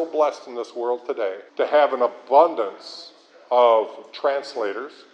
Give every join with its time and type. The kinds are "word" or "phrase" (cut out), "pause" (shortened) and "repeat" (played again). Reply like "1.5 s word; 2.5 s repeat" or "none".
1.5 s pause